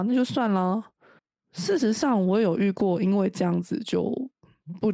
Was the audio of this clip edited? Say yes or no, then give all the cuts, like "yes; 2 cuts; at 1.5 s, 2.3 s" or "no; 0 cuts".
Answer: yes; 1 cut; at 1.2 s